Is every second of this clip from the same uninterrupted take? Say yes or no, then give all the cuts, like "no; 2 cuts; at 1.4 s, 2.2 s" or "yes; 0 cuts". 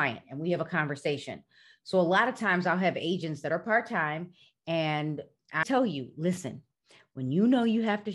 no; 1 cut; at 5.6 s